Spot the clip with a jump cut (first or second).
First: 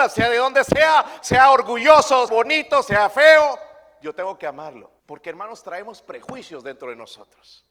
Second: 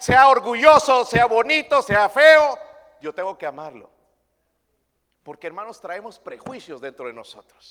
first